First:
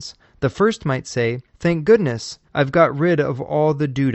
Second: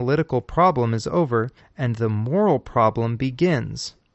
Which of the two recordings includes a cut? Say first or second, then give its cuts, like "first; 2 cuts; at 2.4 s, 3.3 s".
first; 2 cuts; at 1.5 s, 2.5 s